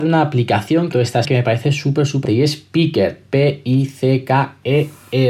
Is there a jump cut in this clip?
yes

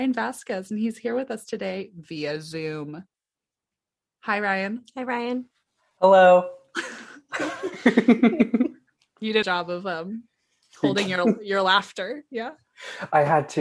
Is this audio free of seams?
no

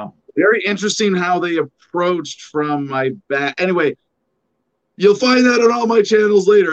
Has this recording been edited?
no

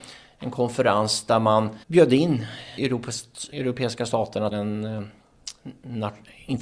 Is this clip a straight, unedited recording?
no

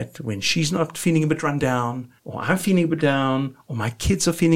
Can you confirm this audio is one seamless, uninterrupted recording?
no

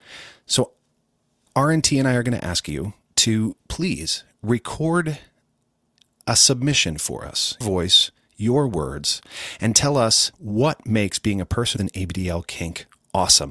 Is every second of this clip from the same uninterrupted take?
no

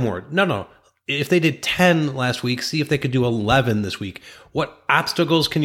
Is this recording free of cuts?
yes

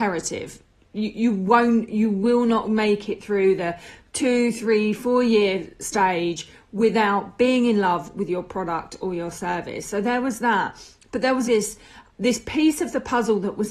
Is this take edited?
yes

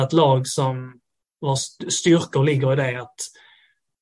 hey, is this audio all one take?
yes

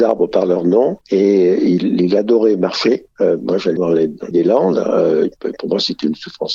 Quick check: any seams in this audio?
yes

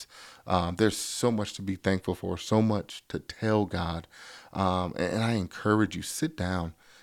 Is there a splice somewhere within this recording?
no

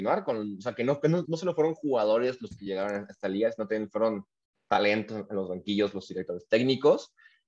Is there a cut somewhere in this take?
yes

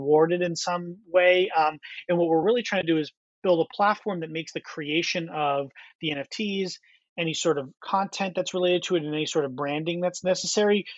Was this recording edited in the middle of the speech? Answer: no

